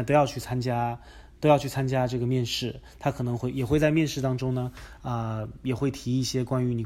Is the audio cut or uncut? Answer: uncut